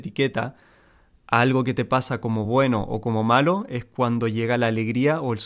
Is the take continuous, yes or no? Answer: yes